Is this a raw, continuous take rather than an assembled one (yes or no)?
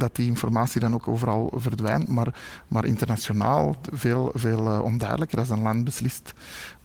yes